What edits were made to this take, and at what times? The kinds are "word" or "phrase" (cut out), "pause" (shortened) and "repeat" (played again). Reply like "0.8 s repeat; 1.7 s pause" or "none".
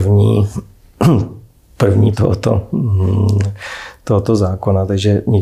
2.1 s word